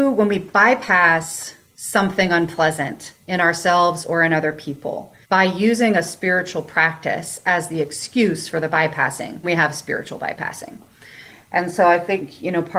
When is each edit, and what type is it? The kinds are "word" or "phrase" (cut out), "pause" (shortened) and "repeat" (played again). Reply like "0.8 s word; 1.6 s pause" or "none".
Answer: 5.2 s pause; 9.4 s word